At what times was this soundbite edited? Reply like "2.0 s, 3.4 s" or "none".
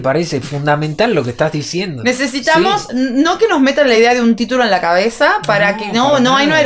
none